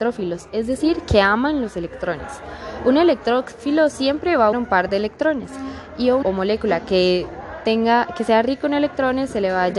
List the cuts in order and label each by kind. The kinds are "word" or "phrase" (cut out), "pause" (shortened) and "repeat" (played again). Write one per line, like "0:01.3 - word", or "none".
0:04.5 - word
0:06.2 - word